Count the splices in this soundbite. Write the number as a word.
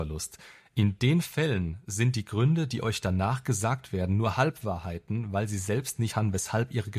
one